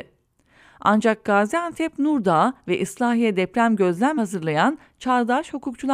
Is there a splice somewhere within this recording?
yes; 1 cut; at 4.2 s

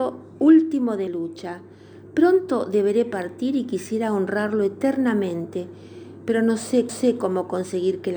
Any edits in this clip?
yes; 2 cuts; at 1.1 s, 6.9 s

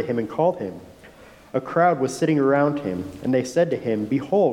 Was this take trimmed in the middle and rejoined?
no; 0 cuts

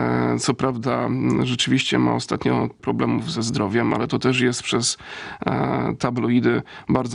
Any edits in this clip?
yes; 1 cut; at 2.8 s

